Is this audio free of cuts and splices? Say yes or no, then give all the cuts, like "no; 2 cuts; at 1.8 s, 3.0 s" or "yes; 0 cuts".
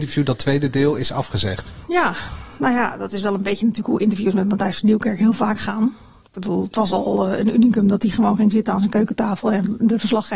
yes; 0 cuts